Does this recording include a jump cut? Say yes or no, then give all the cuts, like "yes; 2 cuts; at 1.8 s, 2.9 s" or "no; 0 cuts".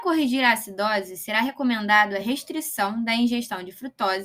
no; 0 cuts